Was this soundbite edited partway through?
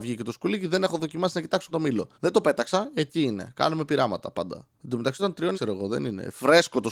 yes; 5 cuts; at 1.7 s, 2.1 s, 4.7 s, 5.2 s, 5.5 s

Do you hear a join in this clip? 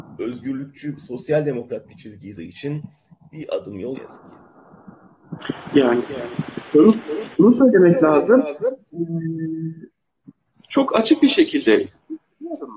yes; 3 cuts; at 2.4 s, 3.9 s, 7.3 s

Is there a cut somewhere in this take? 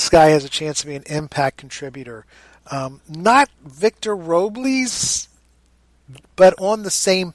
no; 0 cuts

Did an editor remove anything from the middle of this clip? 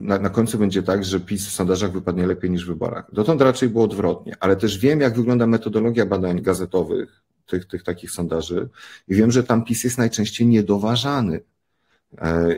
no; 0 cuts

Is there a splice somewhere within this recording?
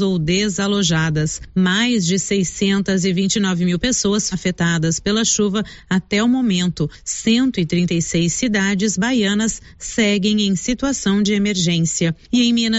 yes; 1 cut; at 4.3 s

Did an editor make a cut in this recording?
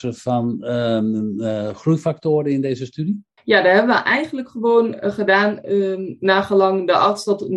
yes; 1 cut; at 3.4 s

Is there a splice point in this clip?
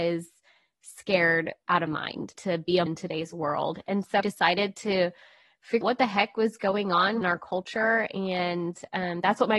yes; 6 cuts; at 1.9 s, 2.3 s, 2.9 s, 4.2 s, 5.8 s, 7.2 s

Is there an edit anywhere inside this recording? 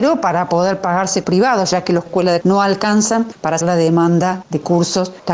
yes; 4 cuts; at 1.2 s, 2.1 s, 2.4 s, 3.6 s

